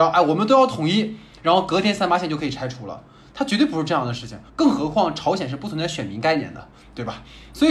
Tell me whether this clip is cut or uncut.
cut